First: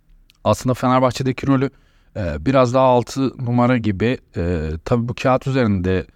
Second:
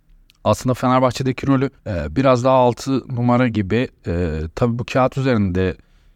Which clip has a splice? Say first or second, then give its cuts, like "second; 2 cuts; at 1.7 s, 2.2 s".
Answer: second; 1 cut; at 1.8 s